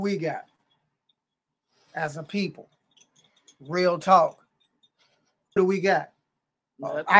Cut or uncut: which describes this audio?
cut